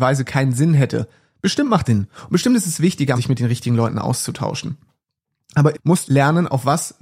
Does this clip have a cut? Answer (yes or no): yes